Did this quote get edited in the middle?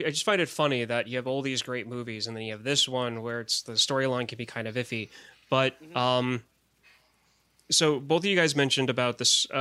no; 0 cuts

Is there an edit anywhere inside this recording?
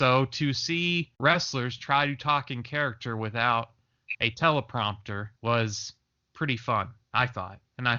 yes; 3 cuts; at 1.1 s, 5.4 s, 7.0 s

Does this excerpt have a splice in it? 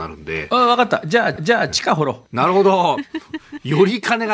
yes; 2 cuts; at 1.4 s, 2.3 s

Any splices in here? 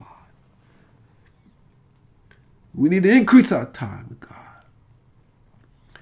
no; 0 cuts

